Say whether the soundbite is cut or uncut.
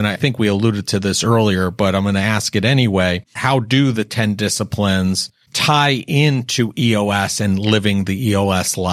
uncut